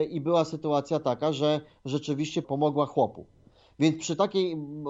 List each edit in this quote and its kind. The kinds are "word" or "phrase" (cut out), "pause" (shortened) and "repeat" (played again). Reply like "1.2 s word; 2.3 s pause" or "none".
2.4 s word